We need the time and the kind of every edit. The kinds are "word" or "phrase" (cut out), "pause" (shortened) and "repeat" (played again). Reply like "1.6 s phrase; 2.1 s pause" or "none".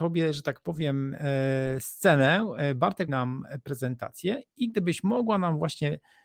3.1 s word

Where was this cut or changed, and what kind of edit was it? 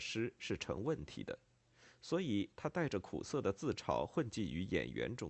none

